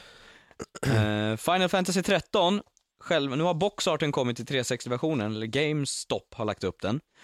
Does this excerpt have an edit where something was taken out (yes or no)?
no